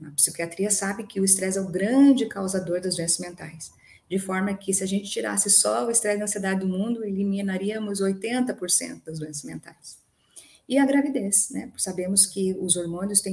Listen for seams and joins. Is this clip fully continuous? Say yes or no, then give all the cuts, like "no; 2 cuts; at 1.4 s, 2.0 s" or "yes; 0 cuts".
yes; 0 cuts